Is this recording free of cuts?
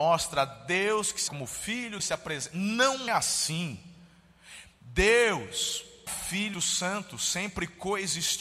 no; 5 cuts; at 1.3 s, 2.0 s, 3.1 s, 6.1 s, 6.5 s

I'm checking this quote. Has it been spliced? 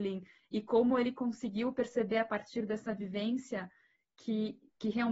no; 0 cuts

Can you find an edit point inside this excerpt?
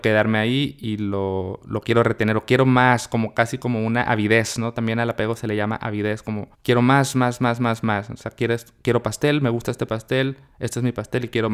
yes; 1 cut; at 6.5 s

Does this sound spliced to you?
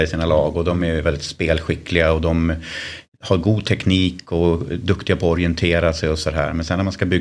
no; 0 cuts

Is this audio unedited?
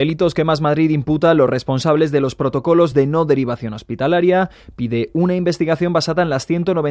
yes; 0 cuts

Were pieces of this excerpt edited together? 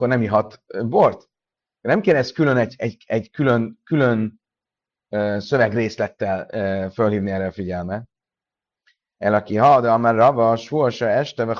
no; 0 cuts

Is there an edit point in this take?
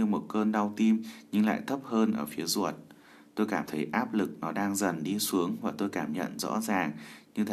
no; 0 cuts

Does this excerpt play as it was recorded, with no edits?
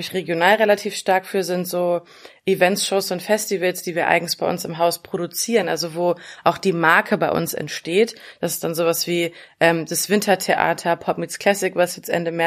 yes; 0 cuts

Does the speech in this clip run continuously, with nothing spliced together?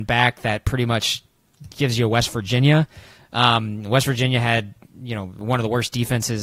yes; 0 cuts

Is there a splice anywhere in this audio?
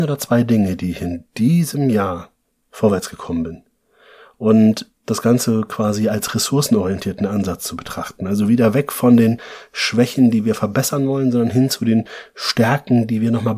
no; 0 cuts

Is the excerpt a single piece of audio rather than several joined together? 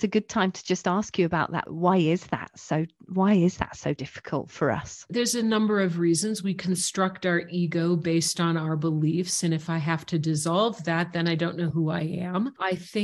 yes; 0 cuts

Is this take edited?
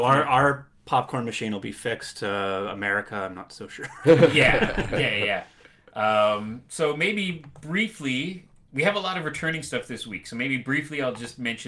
no; 0 cuts

